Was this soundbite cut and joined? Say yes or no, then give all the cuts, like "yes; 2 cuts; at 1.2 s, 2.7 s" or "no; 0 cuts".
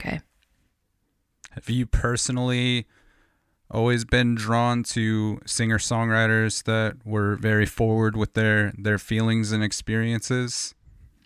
no; 0 cuts